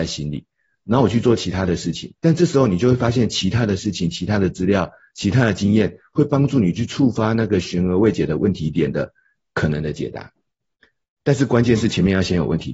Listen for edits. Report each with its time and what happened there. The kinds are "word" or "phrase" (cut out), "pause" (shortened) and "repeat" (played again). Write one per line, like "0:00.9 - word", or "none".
0:02.2 - pause